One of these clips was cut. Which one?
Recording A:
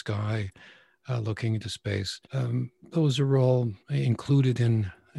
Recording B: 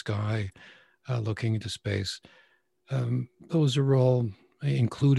A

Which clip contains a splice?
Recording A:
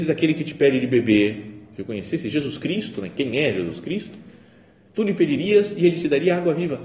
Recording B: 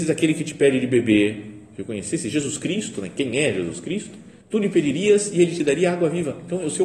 B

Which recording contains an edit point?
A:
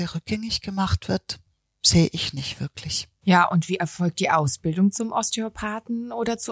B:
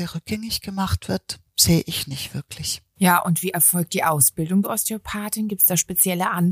B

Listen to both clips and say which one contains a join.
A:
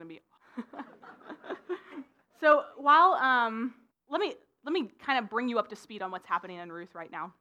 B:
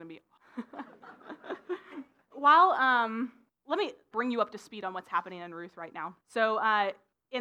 B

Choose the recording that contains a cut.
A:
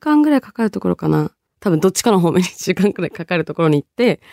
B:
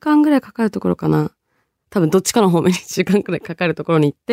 A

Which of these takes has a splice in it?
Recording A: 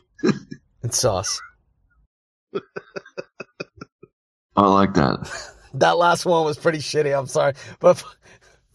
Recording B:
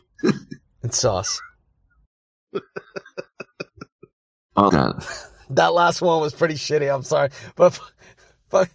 B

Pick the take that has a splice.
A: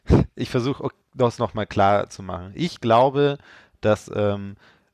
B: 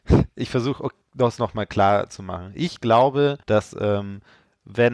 B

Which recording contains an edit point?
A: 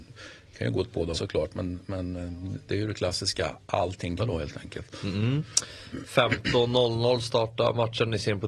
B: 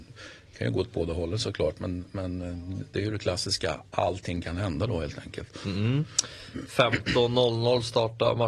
A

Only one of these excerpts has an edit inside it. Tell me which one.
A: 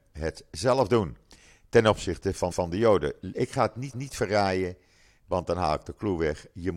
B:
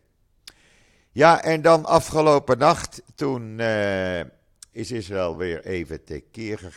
A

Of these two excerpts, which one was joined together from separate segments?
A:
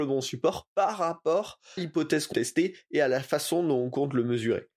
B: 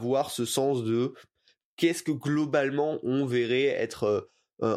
A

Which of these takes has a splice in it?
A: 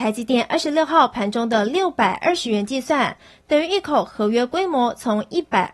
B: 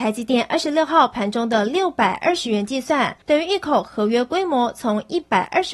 B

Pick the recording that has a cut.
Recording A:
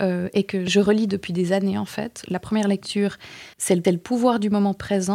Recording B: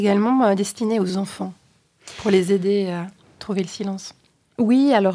A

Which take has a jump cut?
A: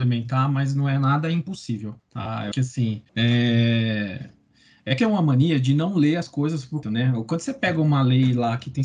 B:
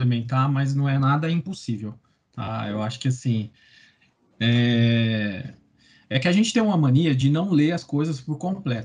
A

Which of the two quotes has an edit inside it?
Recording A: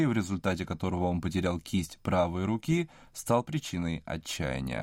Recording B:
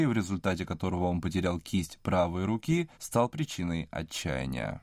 B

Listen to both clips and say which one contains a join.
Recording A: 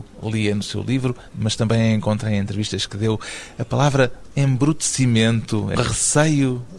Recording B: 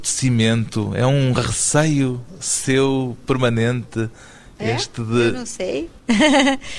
A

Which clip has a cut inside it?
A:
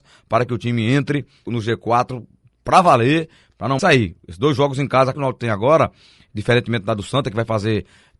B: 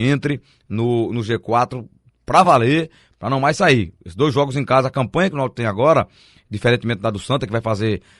A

